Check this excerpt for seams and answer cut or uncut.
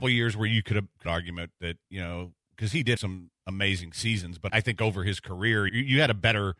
cut